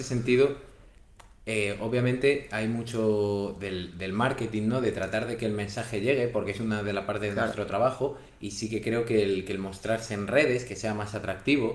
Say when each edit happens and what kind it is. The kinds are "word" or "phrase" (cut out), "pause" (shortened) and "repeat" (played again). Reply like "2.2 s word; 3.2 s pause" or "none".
none